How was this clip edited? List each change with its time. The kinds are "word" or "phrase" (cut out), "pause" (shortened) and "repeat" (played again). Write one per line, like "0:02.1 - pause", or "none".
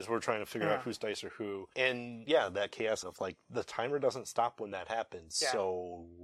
0:03.0 - word